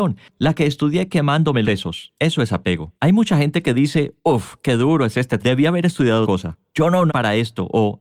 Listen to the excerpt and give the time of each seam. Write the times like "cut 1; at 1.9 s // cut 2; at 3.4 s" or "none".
cut 1; at 1.6 s // cut 2; at 3.0 s // cut 3; at 4.2 s // cut 4; at 5.4 s // cut 5; at 6.2 s // cut 6; at 7.1 s